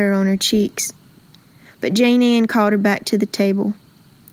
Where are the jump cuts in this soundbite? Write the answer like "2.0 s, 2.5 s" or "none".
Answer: none